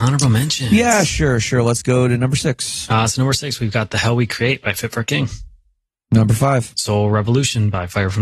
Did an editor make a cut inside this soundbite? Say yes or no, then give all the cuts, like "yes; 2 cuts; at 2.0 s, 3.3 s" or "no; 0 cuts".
no; 0 cuts